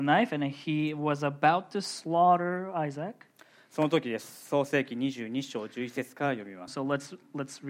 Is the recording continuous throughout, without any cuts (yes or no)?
no